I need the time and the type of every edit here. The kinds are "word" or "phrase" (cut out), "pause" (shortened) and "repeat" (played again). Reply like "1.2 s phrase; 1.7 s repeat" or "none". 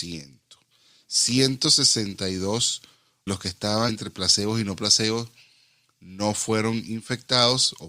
3.3 s word; 3.9 s word